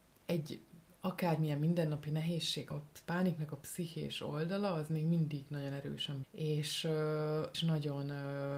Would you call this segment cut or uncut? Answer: cut